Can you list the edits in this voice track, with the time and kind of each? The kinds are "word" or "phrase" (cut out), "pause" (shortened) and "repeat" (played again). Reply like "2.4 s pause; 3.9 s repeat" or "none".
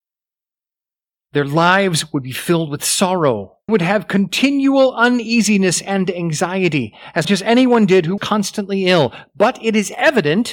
3.7 s phrase; 7.2 s word; 8.2 s word

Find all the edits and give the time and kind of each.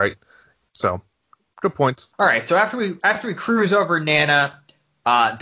2.1 s pause

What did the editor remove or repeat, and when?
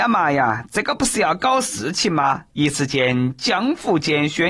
2.5 s pause

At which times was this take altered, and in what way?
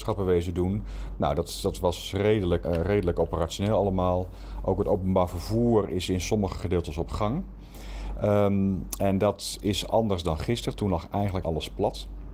2.6 s word; 11.4 s word

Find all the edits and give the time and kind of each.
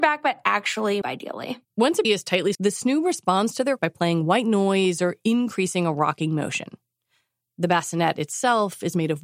1.0 s phrase; 1.6 s pause; 2.0 s word; 2.5 s phrase; 3.8 s word

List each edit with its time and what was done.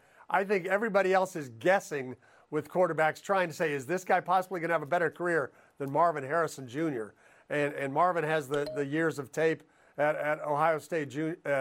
none

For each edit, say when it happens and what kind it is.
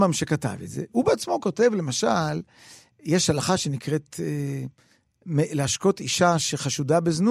none

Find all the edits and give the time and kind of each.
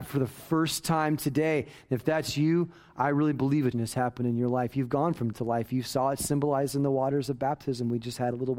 3.7 s word; 5.3 s word

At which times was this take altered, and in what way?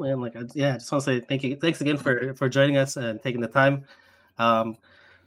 none

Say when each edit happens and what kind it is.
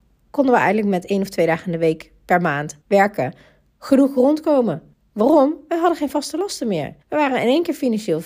2.8 s pause; 4.9 s pause; 7.0 s pause

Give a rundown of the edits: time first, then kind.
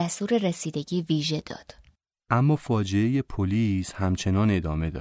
none

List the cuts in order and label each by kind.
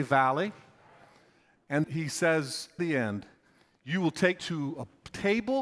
1.8 s word; 2.8 s word; 4.4 s word

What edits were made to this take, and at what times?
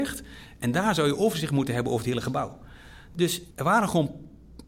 3.5 s pause

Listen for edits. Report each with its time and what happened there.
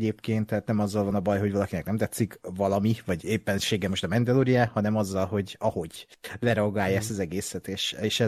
none

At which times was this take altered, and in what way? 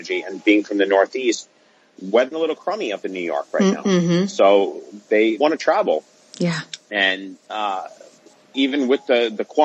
2.3 s phrase; 5.4 s word; 7.4 s pause

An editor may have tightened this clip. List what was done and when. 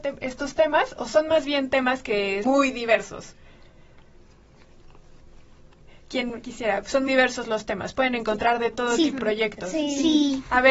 2.4 s word; 6.4 s word; 7.1 s word; 9.2 s word

